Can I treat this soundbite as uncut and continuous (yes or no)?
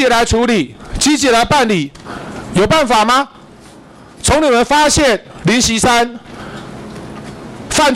yes